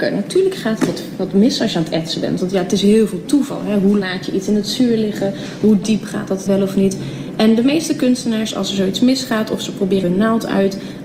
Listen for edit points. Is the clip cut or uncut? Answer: cut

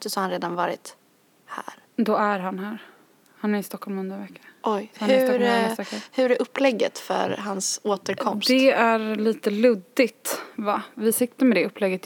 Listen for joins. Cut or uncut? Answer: uncut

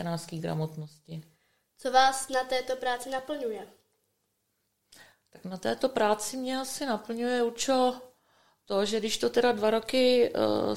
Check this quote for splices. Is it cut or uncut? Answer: uncut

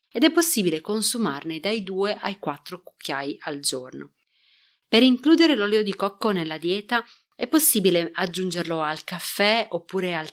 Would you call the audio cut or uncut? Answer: uncut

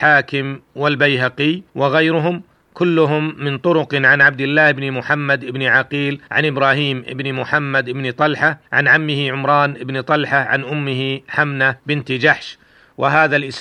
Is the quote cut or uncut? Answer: cut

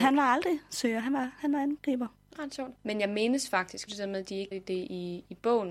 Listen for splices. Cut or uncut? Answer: cut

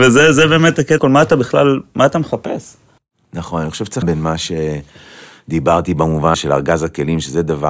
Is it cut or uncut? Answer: cut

